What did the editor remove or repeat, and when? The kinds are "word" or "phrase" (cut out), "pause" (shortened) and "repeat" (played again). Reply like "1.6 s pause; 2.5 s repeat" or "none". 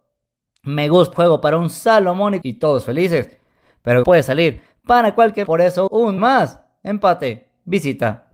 1.1 s word; 2.4 s word; 4.0 s word; 5.4 s word; 5.9 s word; 6.2 s word